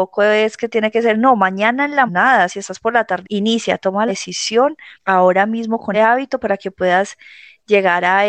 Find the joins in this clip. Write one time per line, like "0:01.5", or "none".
0:02.1
0:03.2
0:04.1
0:04.9
0:05.9